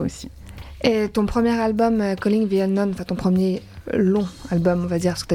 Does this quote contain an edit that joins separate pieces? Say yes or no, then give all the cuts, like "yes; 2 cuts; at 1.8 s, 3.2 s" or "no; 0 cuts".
no; 0 cuts